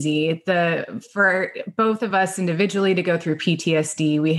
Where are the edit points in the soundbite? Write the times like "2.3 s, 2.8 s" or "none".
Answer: none